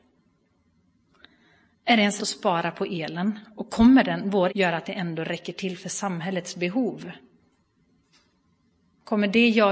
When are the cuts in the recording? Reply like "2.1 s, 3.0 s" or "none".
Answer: 2.2 s, 4.5 s